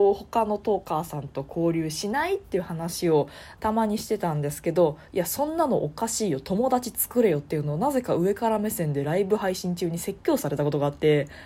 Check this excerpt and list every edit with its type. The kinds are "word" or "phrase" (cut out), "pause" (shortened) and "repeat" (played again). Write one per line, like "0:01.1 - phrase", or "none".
0:03.6 - phrase